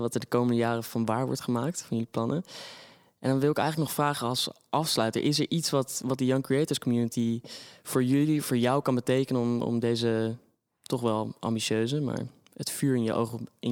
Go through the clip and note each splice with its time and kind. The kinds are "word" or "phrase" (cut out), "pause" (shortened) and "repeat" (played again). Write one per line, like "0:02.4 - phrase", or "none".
none